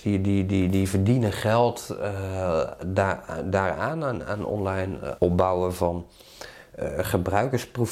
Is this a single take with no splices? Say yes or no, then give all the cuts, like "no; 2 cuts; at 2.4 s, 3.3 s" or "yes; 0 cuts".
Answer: no; 1 cut; at 5.2 s